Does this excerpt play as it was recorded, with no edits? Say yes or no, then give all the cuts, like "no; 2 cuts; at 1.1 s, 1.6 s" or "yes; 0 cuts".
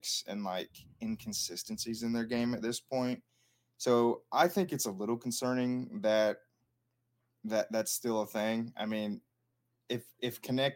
yes; 0 cuts